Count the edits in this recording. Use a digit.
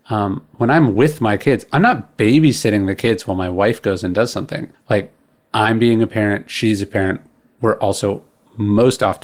1